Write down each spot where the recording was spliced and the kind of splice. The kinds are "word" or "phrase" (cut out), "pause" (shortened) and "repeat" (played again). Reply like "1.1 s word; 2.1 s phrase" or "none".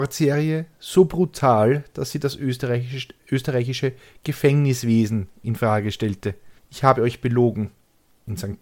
3.2 s pause; 6.6 s pause